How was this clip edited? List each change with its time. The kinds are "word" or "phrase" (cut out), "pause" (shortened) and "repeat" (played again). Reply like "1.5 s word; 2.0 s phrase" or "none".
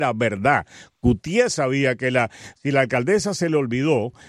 none